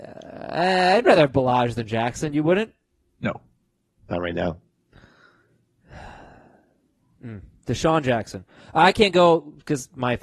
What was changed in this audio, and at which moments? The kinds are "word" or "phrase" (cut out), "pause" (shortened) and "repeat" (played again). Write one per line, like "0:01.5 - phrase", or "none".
none